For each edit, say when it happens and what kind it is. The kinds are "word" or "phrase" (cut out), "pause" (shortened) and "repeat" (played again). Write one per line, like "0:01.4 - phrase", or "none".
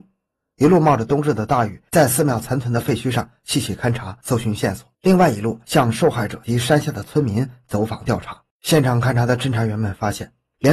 0:04.9 - pause
0:08.5 - pause